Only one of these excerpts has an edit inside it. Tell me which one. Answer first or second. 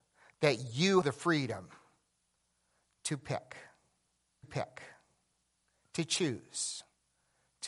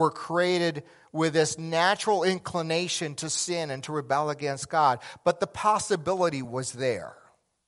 first